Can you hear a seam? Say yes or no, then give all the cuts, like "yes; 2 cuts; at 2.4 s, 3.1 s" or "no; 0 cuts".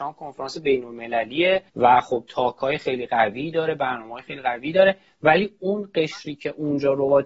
yes; 1 cut; at 1.7 s